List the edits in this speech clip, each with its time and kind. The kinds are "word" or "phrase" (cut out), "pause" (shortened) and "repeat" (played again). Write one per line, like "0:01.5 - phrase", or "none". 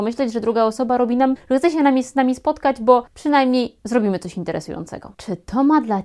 0:01.4 - word
0:03.1 - pause
0:05.1 - pause